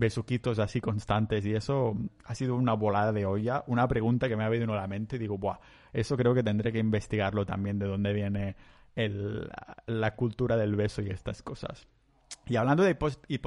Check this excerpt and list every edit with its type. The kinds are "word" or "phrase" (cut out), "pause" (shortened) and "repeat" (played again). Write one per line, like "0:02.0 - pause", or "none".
none